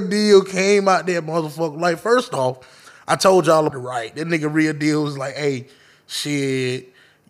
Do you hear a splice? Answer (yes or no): yes